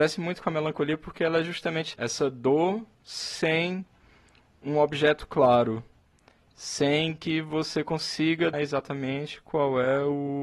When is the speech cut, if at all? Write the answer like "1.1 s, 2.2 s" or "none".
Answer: 1.9 s, 8.5 s